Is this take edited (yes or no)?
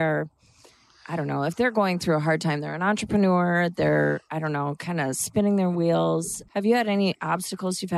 yes